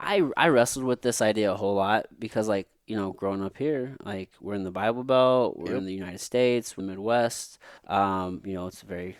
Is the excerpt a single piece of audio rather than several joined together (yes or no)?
no